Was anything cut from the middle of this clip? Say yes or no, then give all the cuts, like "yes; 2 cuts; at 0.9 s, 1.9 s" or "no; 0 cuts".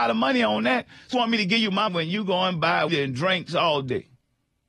yes; 3 cuts; at 1.1 s, 1.9 s, 2.9 s